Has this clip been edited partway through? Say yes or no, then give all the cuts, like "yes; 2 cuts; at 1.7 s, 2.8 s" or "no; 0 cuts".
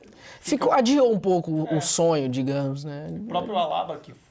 no; 0 cuts